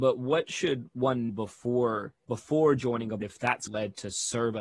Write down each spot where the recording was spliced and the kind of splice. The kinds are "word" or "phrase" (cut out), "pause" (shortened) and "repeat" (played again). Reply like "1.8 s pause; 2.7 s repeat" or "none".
1.3 s word; 2.2 s pause; 3.2 s word; 3.7 s phrase